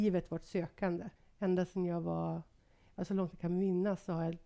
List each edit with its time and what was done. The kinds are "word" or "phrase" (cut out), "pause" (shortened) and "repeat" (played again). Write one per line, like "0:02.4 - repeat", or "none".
0:01.2 - pause